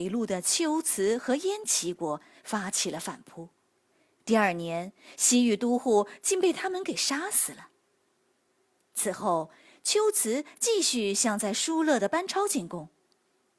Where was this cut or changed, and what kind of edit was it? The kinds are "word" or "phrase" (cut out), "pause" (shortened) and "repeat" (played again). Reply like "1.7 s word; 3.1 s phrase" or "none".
none

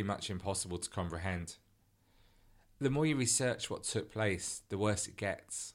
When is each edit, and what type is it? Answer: none

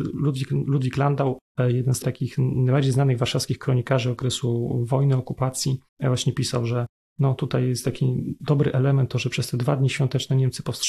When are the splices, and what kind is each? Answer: 2.0 s word; 5.9 s pause

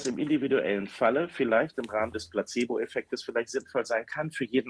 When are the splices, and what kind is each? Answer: none

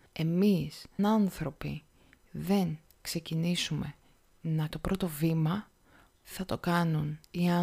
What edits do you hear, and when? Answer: 1.0 s word; 4.7 s word; 6.2 s word

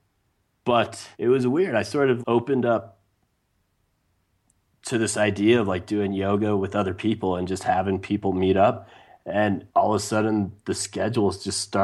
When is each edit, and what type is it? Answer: 1.1 s pause; 2.2 s word; 9.7 s pause

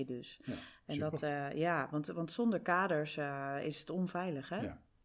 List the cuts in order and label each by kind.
none

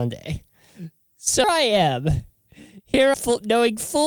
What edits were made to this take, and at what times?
1.4 s word; 3.1 s phrase

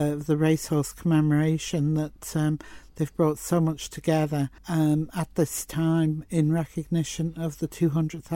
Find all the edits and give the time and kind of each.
4.6 s pause

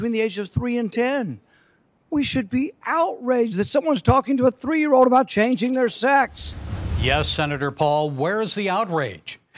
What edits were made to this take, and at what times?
none

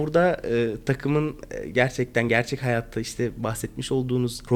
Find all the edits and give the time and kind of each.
none

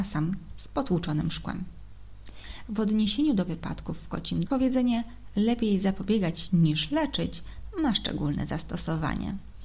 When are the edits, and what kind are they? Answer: 3.5 s word; 4.5 s word; 6.5 s word

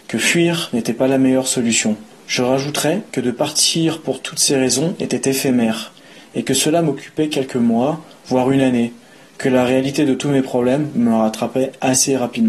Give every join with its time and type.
none

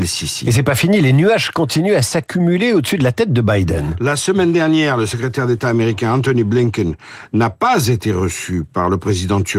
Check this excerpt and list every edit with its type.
none

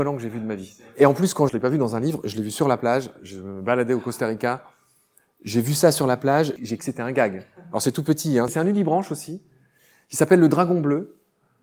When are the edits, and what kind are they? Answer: 1.5 s phrase; 6.8 s word

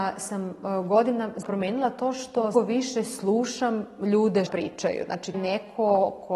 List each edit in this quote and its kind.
1.4 s word; 2.5 s phrase; 4.5 s word; 5.3 s word

